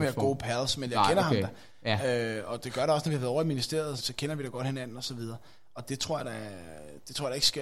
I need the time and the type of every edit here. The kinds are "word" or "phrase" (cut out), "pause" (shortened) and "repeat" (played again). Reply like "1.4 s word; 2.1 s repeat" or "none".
4.0 s word